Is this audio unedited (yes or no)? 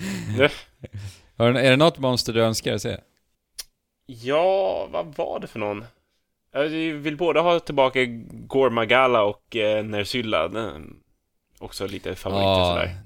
yes